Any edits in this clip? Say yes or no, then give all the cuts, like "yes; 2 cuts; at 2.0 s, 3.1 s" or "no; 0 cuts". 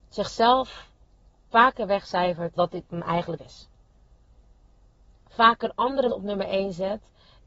yes; 3 cuts; at 2.6 s, 3.4 s, 6.1 s